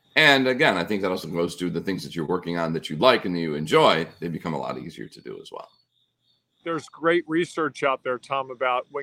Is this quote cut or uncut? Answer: uncut